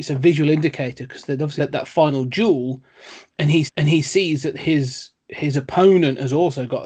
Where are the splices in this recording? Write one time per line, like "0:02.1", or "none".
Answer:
0:01.6
0:03.7